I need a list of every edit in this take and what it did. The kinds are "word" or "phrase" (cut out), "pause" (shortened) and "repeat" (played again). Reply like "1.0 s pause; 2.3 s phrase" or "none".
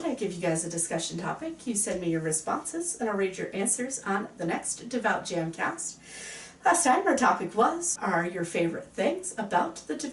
8.0 s word